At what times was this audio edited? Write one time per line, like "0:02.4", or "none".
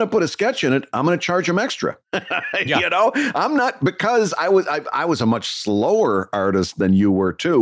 0:02.0

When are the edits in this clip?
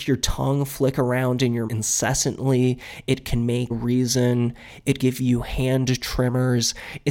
0:01.7
0:03.7
0:05.0

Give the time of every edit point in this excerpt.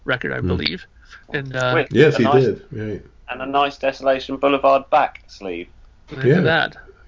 0:01.2

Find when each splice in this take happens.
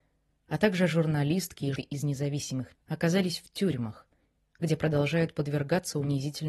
0:01.8
0:02.7

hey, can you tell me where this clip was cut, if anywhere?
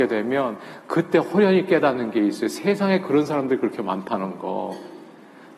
none

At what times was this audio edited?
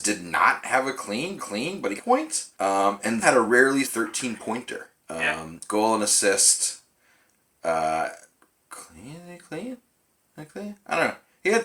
0:01.4
0:02.0
0:02.5
0:03.2
0:03.8
0:05.0

